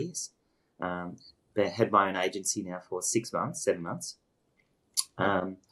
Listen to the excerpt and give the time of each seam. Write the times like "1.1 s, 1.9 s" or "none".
none